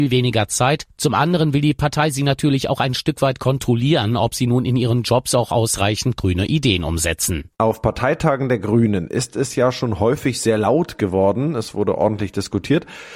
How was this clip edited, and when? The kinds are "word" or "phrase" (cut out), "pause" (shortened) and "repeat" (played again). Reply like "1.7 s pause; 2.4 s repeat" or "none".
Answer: 7.5 s pause